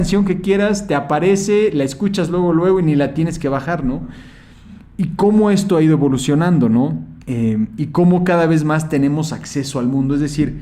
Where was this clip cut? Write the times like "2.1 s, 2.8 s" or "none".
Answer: 7.2 s